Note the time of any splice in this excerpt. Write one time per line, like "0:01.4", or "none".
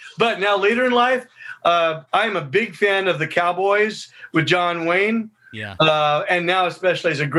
0:02.1